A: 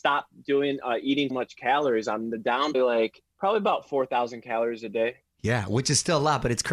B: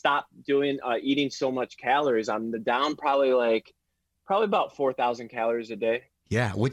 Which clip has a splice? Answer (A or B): A